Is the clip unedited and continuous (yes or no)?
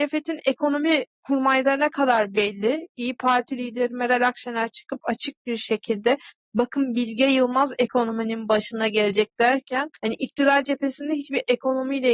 no